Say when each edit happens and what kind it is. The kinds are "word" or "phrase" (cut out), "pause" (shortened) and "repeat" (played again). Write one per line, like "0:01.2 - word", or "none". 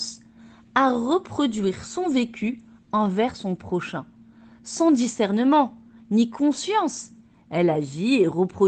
none